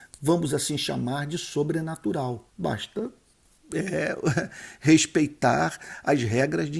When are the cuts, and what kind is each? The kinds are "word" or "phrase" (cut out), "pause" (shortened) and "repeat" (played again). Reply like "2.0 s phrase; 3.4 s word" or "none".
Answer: 2.5 s pause